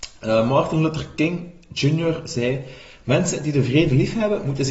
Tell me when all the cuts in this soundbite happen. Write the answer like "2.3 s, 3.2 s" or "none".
none